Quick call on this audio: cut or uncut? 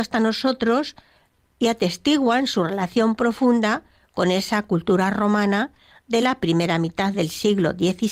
uncut